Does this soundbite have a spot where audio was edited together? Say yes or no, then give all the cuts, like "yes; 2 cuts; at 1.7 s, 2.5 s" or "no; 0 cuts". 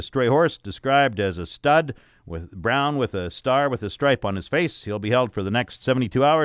no; 0 cuts